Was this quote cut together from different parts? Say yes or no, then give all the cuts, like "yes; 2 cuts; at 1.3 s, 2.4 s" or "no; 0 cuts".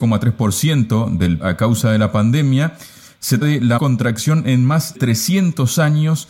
yes; 4 cuts; at 1.4 s, 3.4 s, 3.8 s, 4.9 s